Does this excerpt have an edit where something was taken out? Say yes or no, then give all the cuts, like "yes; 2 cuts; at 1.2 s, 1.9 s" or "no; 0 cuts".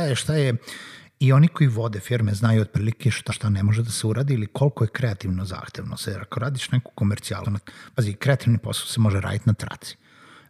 yes; 2 cuts; at 3.3 s, 7.4 s